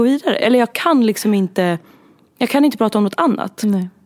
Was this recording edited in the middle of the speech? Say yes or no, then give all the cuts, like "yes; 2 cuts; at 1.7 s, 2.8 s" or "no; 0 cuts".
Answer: no; 0 cuts